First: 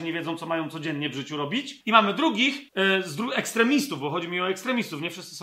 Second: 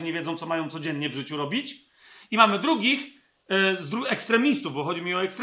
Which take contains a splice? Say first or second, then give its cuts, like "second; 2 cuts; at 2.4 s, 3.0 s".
first; 2 cuts; at 1.8 s, 2.7 s